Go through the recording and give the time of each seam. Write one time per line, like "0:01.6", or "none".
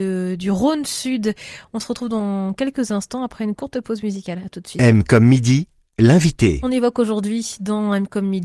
none

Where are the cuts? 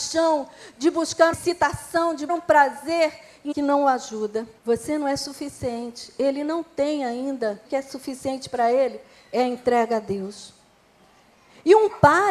0:01.3
0:02.3
0:03.5
0:04.6
0:07.6

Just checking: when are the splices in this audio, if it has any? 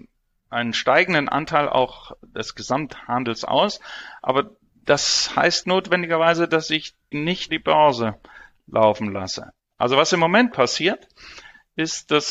0:05.6
0:07.1
0:07.5
0:10.5

